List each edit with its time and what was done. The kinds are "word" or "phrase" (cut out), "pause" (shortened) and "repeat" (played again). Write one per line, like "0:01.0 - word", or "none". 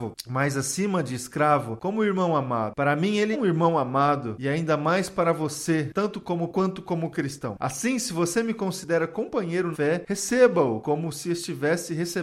0:03.3 - word
0:06.5 - word
0:09.7 - word